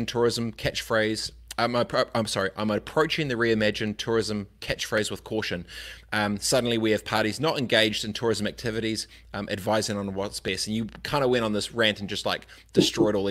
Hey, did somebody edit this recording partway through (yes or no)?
no